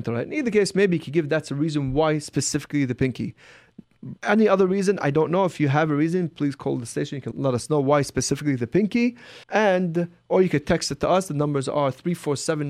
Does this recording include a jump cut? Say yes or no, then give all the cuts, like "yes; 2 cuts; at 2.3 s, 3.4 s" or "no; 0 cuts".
yes; 3 cuts; at 4.2 s, 7.3 s, 9.4 s